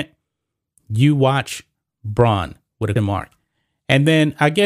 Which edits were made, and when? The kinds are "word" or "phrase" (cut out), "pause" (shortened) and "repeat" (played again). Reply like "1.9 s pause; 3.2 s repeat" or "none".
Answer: 3.0 s word